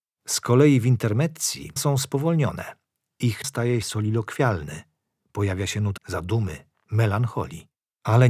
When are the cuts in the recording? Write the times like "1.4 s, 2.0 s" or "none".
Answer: 1.8 s, 3.4 s, 3.8 s, 6.0 s